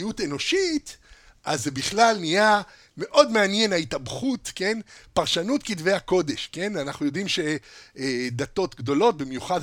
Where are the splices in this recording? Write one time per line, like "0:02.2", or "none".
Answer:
none